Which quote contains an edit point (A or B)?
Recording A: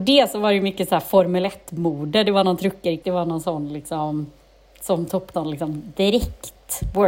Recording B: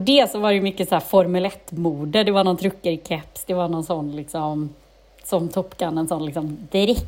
A